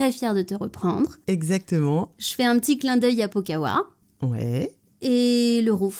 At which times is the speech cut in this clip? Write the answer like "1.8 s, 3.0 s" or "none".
none